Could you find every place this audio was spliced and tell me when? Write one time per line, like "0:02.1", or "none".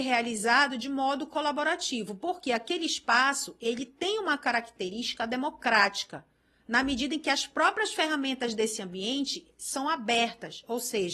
none